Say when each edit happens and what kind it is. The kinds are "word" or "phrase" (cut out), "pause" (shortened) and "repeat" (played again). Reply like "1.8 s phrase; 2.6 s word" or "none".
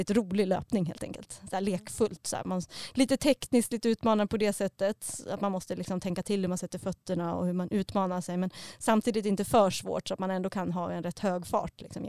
none